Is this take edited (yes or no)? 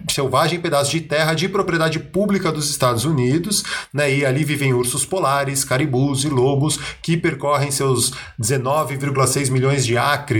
no